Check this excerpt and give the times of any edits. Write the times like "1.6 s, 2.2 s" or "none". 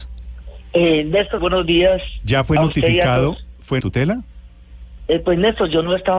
1.4 s, 3.8 s